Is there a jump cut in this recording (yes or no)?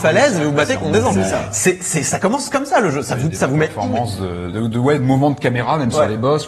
no